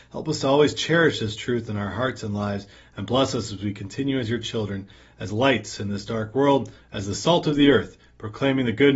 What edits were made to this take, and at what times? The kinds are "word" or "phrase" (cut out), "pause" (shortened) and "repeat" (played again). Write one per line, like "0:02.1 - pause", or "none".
none

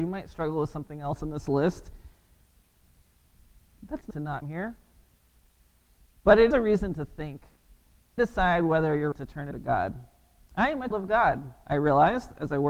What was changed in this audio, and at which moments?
0:04.1 - word
0:04.4 - word
0:06.5 - word
0:08.2 - word
0:09.1 - word
0:09.5 - word
0:10.9 - word

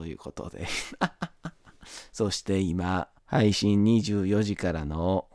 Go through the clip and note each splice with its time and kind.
0:03.2 - pause

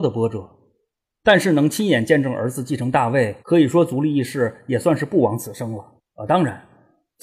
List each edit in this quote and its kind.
0:03.4 - pause
0:06.0 - pause

